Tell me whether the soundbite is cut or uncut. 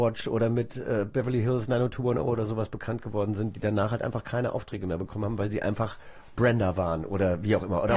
uncut